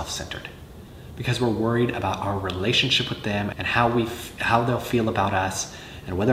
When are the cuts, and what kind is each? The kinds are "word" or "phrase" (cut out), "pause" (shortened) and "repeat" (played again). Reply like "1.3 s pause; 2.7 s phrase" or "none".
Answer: 3.5 s word